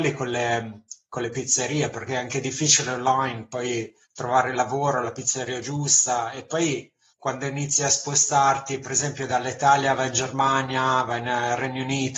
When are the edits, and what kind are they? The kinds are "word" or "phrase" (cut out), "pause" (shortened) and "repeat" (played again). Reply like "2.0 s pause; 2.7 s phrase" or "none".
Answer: 4.0 s pause; 7.1 s pause